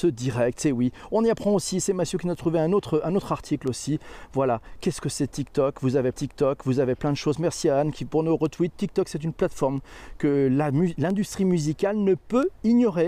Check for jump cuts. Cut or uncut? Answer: cut